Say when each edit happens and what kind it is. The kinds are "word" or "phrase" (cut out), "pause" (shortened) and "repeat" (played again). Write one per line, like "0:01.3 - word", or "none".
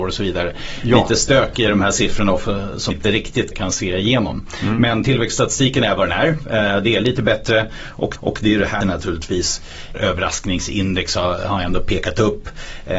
0:02.9 - word
0:03.5 - word
0:08.2 - repeat
0:08.8 - phrase
0:09.9 - phrase